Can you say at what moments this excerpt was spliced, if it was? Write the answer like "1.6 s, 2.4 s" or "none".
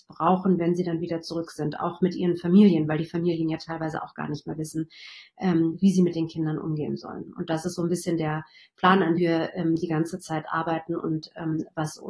9.2 s